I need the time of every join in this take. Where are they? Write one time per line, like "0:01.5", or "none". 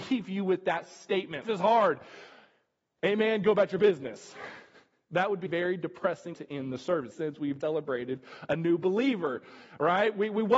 0:01.4
0:05.5
0:06.3
0:07.1
0:07.6